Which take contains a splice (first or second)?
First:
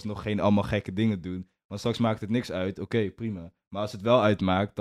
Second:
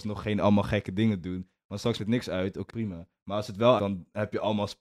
second